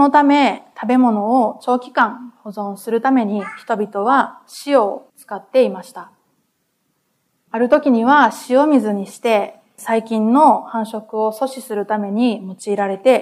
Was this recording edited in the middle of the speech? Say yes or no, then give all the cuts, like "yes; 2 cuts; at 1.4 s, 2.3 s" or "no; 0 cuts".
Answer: no; 0 cuts